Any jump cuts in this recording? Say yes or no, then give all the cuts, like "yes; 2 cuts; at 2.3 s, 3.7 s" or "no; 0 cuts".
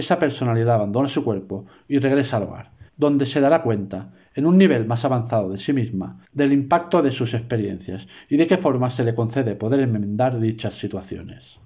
yes; 2 cuts; at 2.9 s, 6.2 s